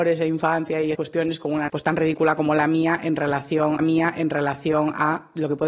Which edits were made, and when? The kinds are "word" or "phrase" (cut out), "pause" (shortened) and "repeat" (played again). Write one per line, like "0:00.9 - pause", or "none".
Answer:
0:00.9 - word
0:01.7 - word
0:03.8 - repeat